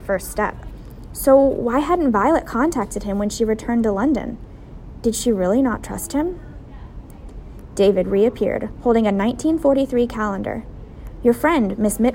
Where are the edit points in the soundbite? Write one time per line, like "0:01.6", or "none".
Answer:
none